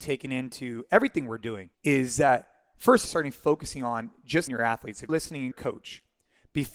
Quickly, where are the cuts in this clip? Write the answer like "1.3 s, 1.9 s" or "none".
1.7 s, 3.0 s, 4.5 s, 5.1 s, 5.5 s

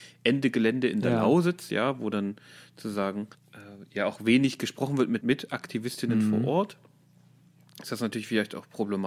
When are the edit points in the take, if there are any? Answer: 3.3 s, 5.2 s

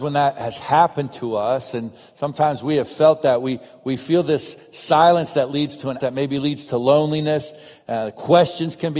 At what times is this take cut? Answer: 6.0 s

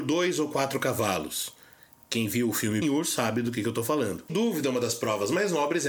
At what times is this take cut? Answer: 2.8 s, 4.3 s

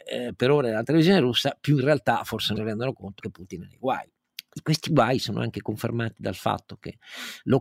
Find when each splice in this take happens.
2.6 s, 3.2 s

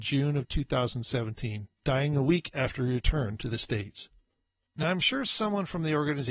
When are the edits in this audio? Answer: none

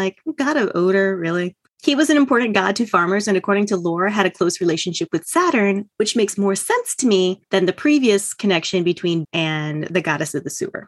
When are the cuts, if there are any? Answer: 5.9 s, 7.4 s, 9.2 s

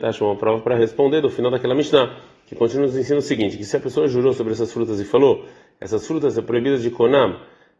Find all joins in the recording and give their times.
none

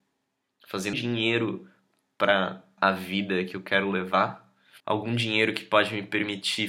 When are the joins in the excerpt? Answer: 0.9 s, 2.8 s, 4.8 s

